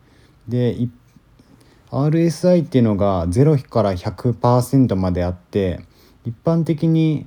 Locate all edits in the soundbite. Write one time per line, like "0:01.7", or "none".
none